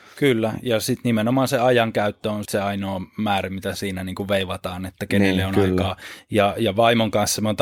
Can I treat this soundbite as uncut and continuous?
no; 1 cut; at 2.4 s

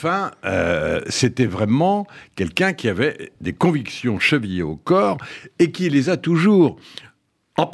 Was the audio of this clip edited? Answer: no; 0 cuts

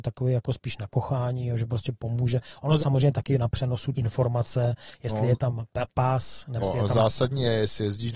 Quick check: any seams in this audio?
yes; 3 cuts; at 2.8 s, 3.9 s, 6.6 s

